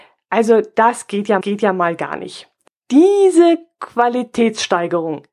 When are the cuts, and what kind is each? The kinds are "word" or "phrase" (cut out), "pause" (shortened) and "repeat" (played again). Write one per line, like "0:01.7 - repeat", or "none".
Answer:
0:01.4 - repeat
0:02.7 - pause